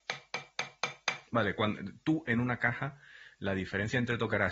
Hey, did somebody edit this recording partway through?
yes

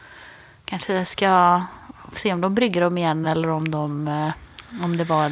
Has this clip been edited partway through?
no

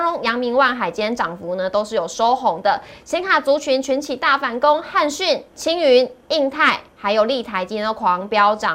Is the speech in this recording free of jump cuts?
no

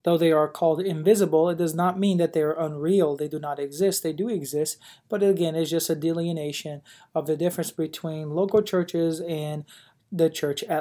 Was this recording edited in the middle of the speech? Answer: no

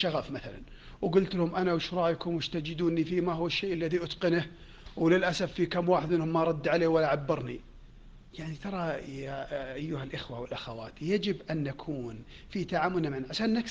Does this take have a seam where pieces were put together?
no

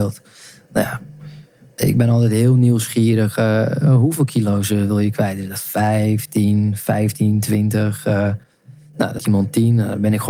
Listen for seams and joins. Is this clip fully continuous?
no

